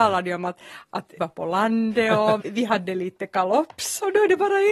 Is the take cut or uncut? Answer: cut